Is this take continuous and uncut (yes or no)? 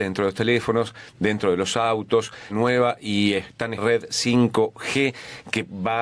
no